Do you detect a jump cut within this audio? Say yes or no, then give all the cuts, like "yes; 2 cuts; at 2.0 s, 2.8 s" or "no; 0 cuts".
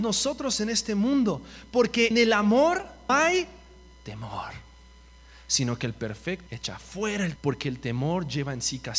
yes; 4 cuts; at 2.1 s, 3.1 s, 6.5 s, 7.4 s